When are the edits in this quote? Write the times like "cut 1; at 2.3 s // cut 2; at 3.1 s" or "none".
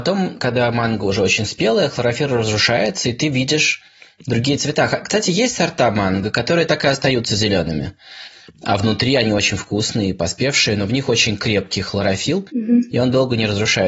none